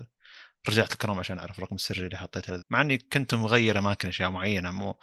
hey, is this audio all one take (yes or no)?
no